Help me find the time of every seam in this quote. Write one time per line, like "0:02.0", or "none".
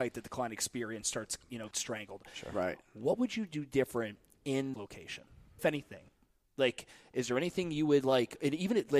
0:01.7
0:04.7
0:05.6